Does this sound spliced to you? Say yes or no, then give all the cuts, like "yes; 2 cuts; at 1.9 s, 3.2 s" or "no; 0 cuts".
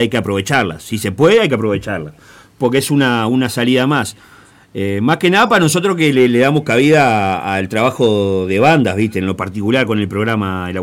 no; 0 cuts